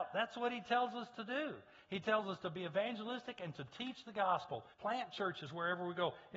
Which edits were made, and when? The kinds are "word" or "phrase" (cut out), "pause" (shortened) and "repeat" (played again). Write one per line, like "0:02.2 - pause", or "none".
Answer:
0:04.7 - pause